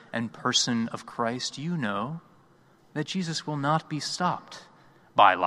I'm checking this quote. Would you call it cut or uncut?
uncut